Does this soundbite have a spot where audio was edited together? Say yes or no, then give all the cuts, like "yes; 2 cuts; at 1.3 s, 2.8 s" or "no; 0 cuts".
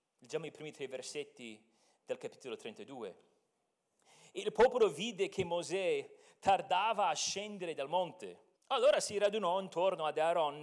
yes; 1 cut; at 8.6 s